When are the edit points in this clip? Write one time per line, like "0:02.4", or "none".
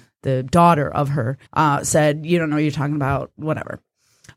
0:01.5